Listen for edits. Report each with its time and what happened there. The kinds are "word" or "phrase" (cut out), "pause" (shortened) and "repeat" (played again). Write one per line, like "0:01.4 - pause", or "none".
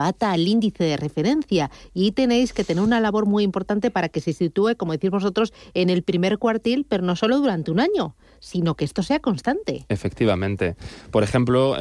none